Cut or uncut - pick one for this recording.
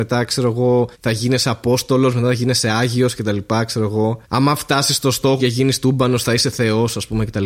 cut